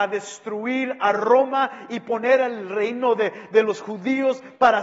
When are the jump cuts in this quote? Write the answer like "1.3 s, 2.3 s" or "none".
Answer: none